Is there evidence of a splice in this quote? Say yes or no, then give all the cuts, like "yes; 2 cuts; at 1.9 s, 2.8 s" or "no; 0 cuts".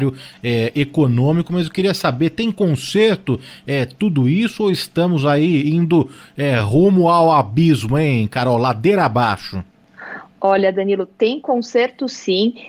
no; 0 cuts